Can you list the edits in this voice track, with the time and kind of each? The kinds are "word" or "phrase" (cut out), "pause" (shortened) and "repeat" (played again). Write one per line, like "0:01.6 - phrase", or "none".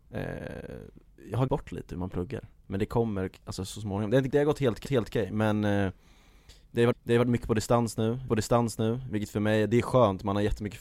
0:01.5 - word
0:02.6 - pause
0:04.3 - word
0:04.8 - repeat
0:06.9 - repeat
0:08.3 - repeat